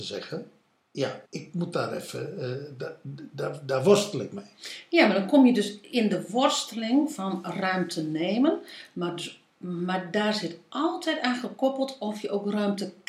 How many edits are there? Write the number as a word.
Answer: one